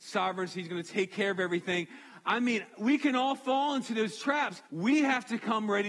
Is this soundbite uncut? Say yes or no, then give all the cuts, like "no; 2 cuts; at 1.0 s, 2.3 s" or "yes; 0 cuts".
no; 1 cut; at 4.7 s